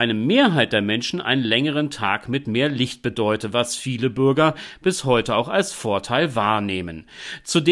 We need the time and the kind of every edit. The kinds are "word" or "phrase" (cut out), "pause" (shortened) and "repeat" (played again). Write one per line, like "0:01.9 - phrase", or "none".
none